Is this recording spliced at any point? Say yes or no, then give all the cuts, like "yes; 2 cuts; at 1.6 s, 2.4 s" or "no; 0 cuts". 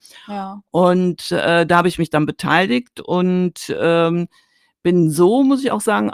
no; 0 cuts